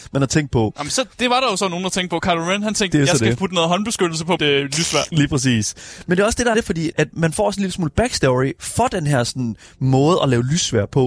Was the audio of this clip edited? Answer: yes; 3 cuts; at 4.4 s, 6.5 s, 6.9 s

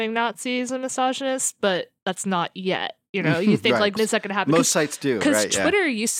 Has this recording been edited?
yes; 1 cut; at 4.0 s

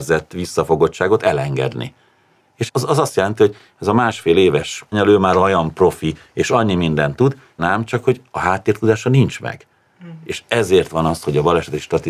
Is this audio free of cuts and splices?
no; 3 cuts; at 2.7 s, 4.9 s, 7.6 s

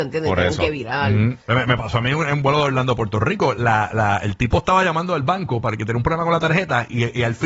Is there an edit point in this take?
yes; 1 cut; at 1.4 s

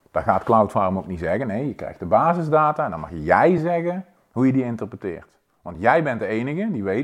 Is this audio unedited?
yes; 0 cuts

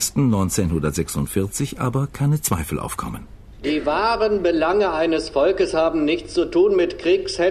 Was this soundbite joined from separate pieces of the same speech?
no; 0 cuts

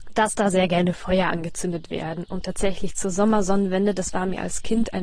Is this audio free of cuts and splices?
yes; 0 cuts

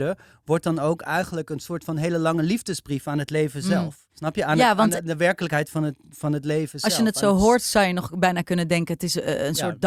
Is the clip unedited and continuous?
no; 1 cut; at 4.1 s

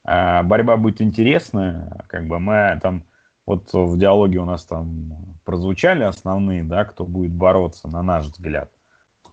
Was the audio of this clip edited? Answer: no; 0 cuts

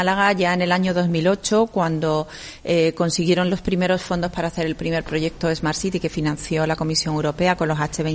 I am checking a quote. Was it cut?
no; 0 cuts

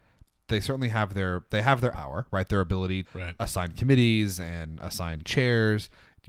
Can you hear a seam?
yes; 3 cuts; at 1.9 s, 3.0 s, 5.2 s

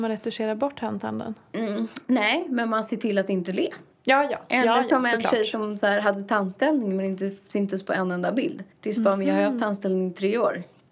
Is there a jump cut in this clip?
yes; 2 cuts; at 3.9 s, 8.7 s

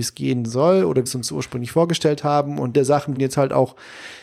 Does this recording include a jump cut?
yes; 3 cuts; at 1.1 s, 2.7 s, 3.2 s

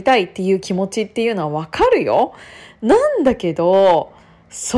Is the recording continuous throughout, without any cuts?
yes; 0 cuts

